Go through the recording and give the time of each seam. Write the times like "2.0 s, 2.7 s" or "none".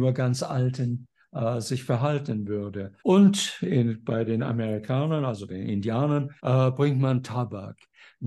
3.0 s, 6.4 s